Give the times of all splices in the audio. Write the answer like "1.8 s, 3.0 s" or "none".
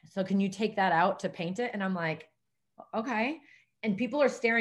none